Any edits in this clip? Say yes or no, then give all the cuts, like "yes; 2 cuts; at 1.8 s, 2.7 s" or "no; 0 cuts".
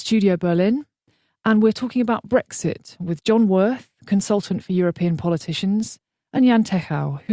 no; 0 cuts